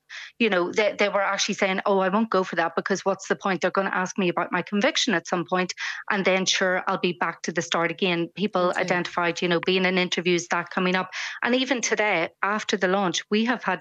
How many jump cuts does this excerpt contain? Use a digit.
0